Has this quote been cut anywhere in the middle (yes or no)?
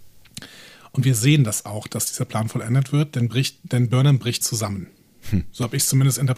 yes